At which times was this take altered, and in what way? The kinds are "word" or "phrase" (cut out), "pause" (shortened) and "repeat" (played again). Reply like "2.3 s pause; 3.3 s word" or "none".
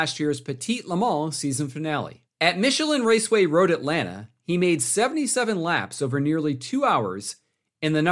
2.3 s pause